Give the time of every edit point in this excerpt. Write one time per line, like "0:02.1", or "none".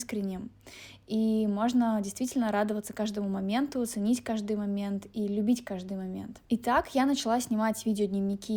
0:06.4